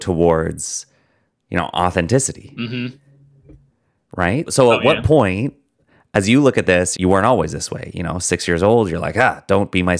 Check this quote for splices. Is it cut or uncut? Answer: cut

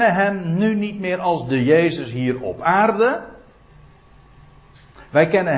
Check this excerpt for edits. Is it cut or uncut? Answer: uncut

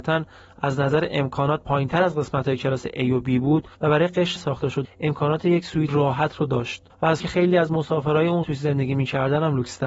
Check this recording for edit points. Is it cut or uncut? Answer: cut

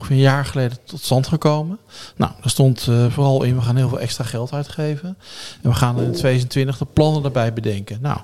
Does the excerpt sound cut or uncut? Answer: uncut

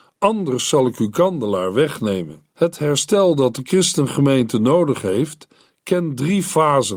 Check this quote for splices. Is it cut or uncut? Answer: cut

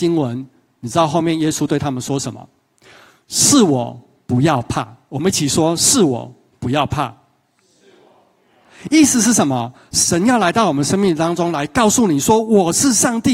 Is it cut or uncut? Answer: uncut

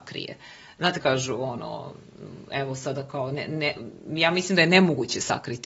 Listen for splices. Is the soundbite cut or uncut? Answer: cut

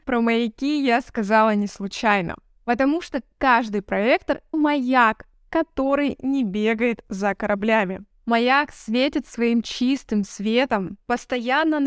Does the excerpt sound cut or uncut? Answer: cut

